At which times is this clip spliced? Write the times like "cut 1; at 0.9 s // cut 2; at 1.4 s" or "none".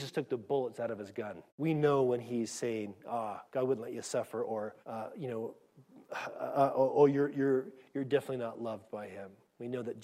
cut 1; at 1.5 s // cut 2; at 3.5 s // cut 3; at 4.8 s